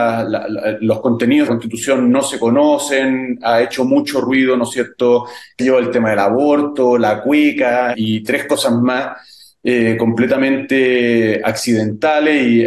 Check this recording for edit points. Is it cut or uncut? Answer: cut